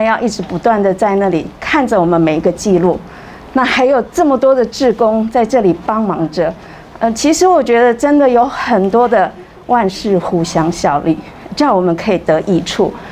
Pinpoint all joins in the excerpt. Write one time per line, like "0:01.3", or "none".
none